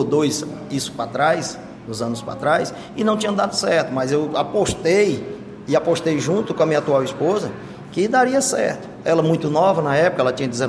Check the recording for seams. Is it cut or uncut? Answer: uncut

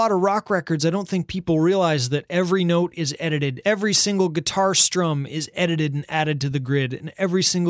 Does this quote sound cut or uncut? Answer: uncut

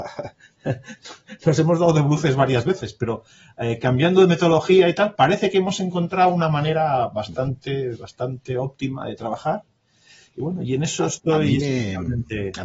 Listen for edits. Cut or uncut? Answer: uncut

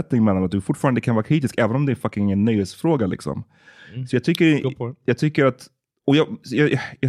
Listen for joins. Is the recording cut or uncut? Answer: uncut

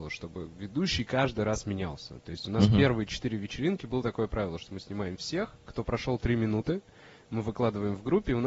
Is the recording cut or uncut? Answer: uncut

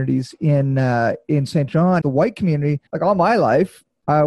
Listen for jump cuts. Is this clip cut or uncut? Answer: cut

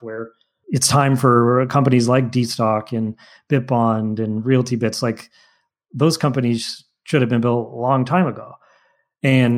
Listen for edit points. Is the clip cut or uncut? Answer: uncut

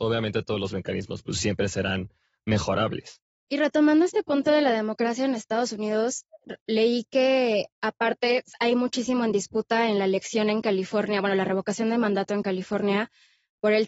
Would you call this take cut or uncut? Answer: cut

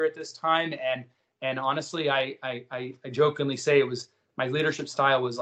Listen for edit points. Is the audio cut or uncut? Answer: uncut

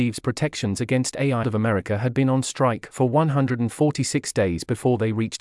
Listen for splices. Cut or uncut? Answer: cut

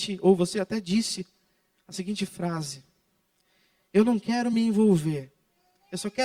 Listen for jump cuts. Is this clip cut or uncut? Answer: uncut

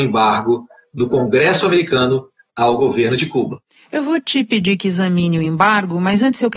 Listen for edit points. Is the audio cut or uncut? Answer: uncut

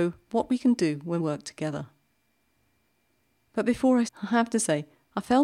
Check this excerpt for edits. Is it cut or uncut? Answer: cut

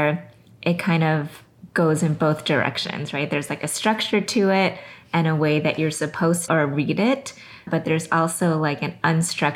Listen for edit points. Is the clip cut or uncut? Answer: cut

